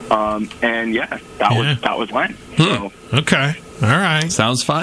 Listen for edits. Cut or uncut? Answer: cut